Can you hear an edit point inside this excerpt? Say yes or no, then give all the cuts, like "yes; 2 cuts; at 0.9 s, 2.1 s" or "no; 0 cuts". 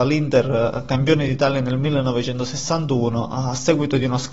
no; 0 cuts